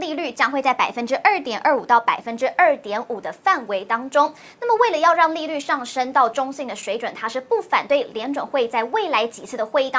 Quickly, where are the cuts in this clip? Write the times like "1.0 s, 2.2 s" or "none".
none